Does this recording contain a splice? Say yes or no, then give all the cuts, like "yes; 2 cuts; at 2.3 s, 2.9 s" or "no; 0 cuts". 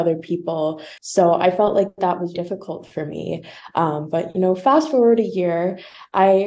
yes; 2 cuts; at 1.0 s, 2.3 s